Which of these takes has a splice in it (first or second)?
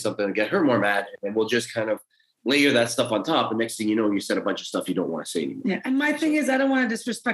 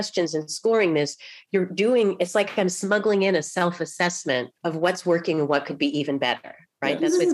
second